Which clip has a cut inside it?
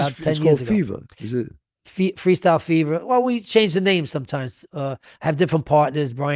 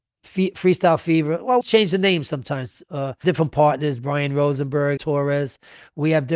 second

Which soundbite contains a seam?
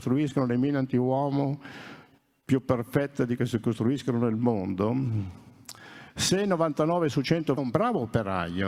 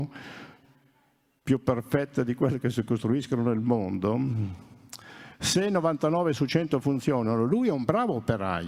first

